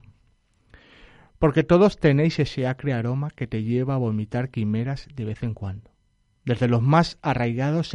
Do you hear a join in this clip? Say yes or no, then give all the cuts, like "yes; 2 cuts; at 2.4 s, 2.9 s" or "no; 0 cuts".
no; 0 cuts